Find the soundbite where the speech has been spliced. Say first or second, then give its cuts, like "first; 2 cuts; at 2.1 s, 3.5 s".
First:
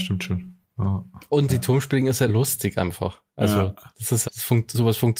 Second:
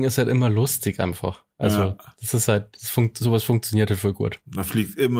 first; 3 cuts; at 1.5 s, 2.3 s, 4.2 s